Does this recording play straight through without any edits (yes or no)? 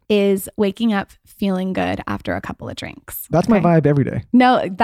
yes